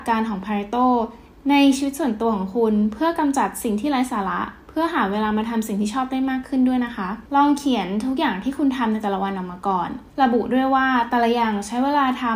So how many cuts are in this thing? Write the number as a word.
two